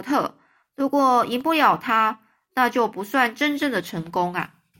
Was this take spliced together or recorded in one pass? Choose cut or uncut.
uncut